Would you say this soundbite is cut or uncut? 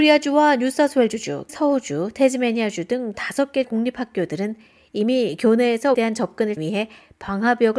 cut